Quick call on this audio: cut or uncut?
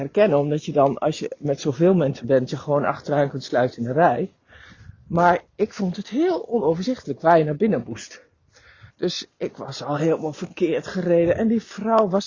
cut